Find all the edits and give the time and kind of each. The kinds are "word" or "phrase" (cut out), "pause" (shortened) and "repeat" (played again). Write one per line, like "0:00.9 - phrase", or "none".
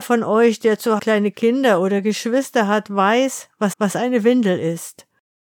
0:01.0 - word
0:03.7 - repeat